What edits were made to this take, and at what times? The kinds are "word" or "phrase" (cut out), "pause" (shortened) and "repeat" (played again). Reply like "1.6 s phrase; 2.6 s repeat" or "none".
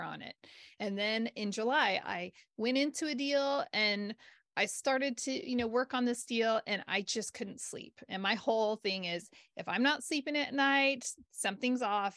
none